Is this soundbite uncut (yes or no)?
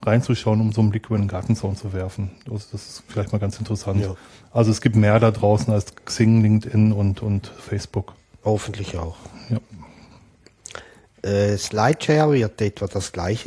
yes